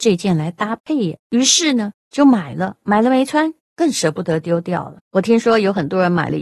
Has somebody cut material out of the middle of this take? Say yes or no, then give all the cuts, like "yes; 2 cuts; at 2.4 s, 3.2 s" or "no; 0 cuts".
yes; 3 cuts; at 1.2 s, 2.0 s, 5.0 s